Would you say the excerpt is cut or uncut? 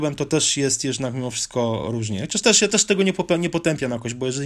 uncut